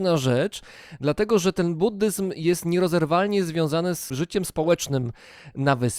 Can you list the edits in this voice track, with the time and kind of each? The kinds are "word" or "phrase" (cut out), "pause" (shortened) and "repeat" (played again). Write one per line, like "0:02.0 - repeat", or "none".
none